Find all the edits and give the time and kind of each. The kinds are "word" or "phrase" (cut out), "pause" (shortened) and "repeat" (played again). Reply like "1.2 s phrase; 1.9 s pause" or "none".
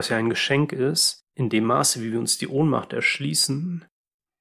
1.3 s pause